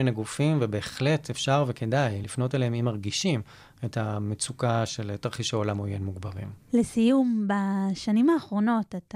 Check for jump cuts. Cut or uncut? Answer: uncut